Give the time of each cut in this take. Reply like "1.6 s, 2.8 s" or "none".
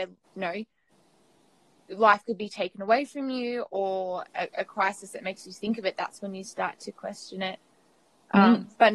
none